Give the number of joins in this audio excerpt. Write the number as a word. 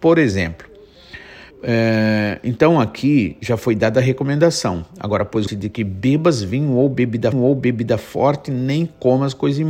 three